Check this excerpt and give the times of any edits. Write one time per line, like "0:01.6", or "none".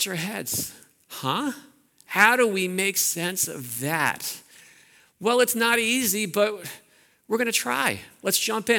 none